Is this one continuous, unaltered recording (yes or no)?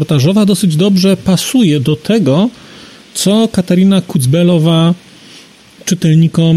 yes